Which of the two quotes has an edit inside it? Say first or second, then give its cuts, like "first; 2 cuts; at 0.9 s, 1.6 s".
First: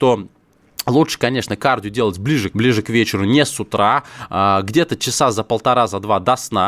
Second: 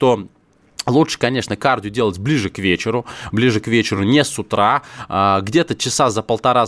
first; 1 cut; at 2.5 s